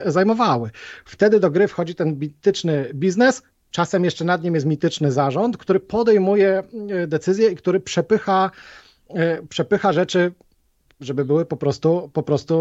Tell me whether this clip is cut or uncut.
uncut